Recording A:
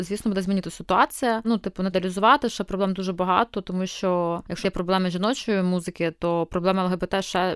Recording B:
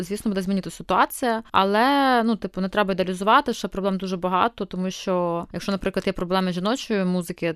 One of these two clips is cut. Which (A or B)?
A